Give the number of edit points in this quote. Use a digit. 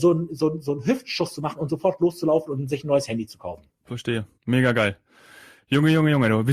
1